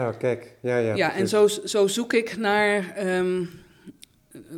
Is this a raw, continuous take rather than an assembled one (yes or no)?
yes